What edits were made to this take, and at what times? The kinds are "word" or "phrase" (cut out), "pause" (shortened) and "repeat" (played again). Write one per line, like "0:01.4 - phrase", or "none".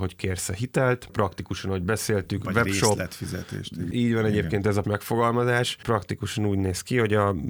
0:04.8 - word